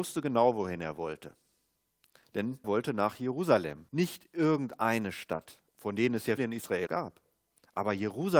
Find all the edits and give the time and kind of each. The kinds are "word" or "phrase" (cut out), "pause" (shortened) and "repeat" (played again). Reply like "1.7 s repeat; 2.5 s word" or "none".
2.6 s word; 3.9 s pause; 5.7 s pause; 6.4 s word; 6.9 s word